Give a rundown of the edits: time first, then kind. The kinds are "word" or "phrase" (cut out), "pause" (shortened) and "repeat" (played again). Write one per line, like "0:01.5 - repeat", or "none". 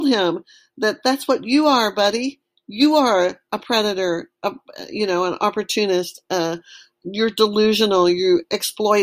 none